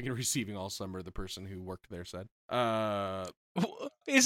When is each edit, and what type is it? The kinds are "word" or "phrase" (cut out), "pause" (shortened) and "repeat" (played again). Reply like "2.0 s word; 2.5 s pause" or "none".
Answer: 2.4 s pause

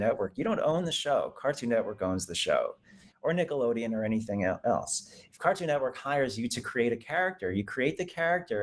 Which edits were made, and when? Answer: none

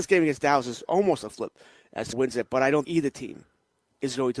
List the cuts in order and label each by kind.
1.3 s word; 2.1 s word; 2.8 s word

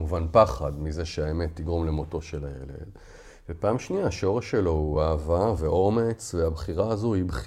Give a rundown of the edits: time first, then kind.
none

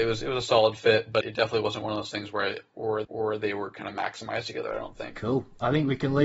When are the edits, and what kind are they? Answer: 1.2 s word; 3.0 s repeat

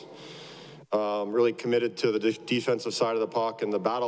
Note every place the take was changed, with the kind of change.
none

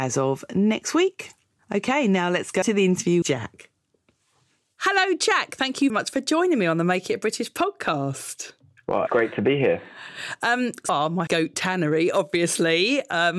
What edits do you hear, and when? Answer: 2.6 s word; 3.2 s word; 5.9 s word; 9.1 s word; 10.9 s word; 11.3 s word

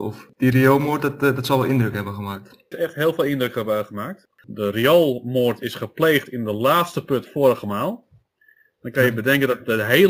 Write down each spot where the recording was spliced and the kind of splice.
2.7 s phrase

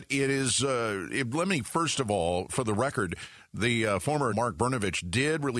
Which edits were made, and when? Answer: 2.5 s word; 4.3 s phrase

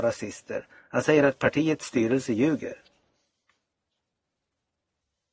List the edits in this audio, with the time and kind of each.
none

